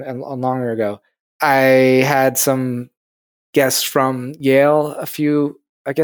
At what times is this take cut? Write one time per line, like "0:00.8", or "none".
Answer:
none